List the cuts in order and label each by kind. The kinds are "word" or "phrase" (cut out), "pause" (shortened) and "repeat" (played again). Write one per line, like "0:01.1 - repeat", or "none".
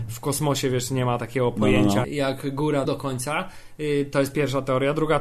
0:02.0 - word
0:02.8 - word